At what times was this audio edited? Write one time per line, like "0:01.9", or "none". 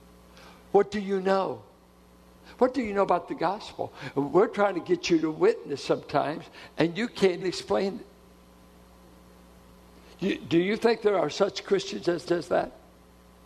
0:07.4
0:12.3